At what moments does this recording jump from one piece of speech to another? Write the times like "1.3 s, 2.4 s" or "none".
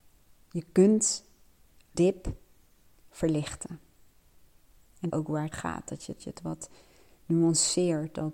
1.9 s, 5.1 s, 5.5 s, 6.2 s